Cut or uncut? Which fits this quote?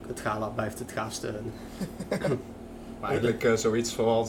uncut